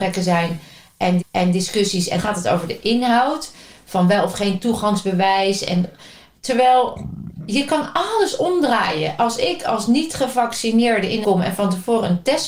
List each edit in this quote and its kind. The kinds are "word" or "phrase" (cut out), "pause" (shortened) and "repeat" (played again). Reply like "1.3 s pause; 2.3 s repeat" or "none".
1.2 s repeat; 2.2 s phrase; 11.2 s phrase